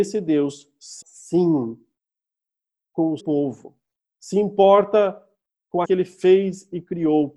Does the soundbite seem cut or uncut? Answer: cut